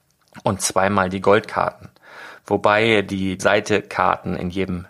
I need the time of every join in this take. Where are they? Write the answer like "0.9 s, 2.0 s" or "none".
3.4 s